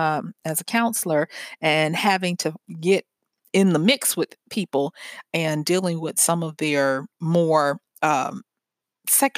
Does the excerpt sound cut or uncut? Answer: uncut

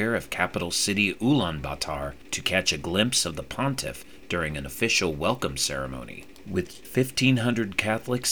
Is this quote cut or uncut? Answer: cut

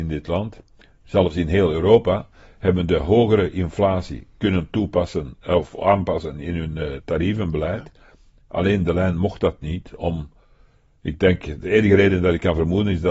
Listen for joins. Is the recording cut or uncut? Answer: uncut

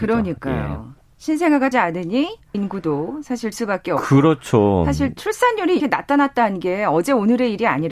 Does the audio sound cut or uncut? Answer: cut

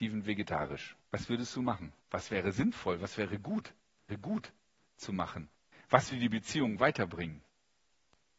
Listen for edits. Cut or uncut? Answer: cut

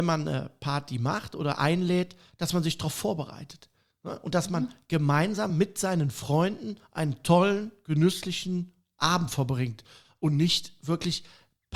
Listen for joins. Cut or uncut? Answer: uncut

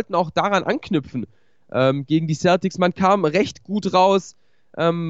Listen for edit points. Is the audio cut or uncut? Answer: uncut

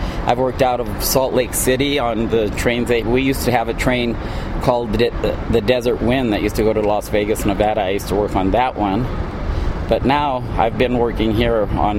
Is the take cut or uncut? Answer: uncut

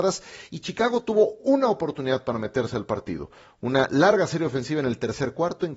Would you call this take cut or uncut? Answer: uncut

